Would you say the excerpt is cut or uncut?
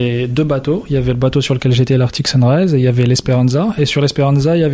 uncut